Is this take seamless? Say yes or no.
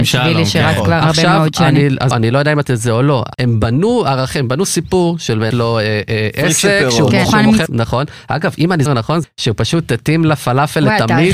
no